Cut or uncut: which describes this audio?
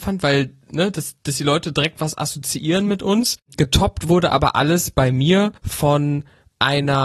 cut